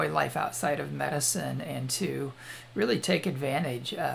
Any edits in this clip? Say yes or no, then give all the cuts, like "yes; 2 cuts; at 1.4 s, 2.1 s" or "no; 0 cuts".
no; 0 cuts